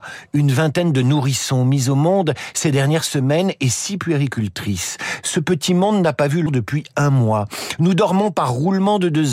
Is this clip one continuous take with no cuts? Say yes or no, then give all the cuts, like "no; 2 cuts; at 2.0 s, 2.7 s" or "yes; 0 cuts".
no; 1 cut; at 6.5 s